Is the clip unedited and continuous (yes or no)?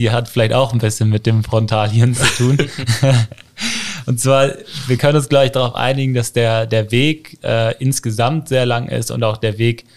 yes